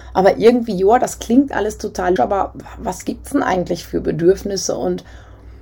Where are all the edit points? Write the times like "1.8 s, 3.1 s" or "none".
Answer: 2.2 s